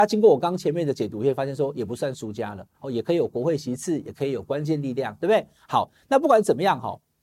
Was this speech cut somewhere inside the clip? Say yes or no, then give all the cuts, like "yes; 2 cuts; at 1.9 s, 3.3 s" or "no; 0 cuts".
yes; 1 cut; at 2.7 s